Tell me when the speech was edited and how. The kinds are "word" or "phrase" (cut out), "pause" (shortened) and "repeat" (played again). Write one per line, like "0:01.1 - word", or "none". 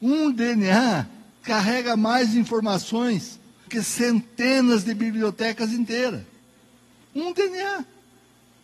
0:01.3 - pause
0:03.7 - word